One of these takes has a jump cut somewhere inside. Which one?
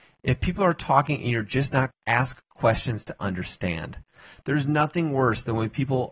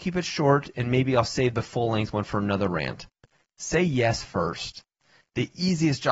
first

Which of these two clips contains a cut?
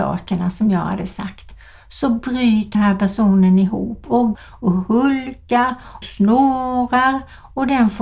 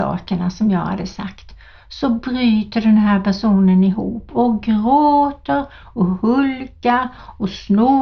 first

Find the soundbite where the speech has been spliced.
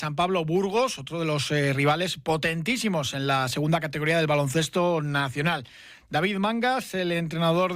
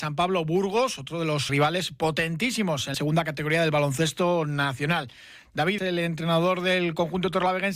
second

